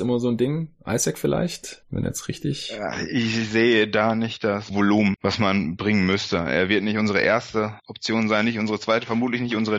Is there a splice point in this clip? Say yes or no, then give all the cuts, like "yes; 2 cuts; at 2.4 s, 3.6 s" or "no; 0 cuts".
yes; 1 cut; at 4.7 s